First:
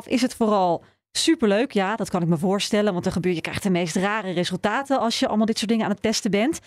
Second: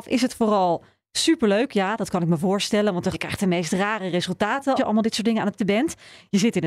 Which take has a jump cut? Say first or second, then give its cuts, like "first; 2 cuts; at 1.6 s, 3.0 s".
second; 3 cuts; at 3.1 s, 4.8 s, 5.6 s